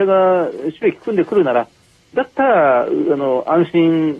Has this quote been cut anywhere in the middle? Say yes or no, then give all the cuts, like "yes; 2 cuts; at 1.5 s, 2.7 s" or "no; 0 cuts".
no; 0 cuts